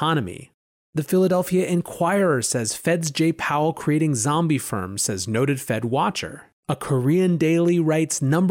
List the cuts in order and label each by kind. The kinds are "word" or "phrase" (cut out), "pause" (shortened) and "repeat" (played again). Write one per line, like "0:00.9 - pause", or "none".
0:06.6 - pause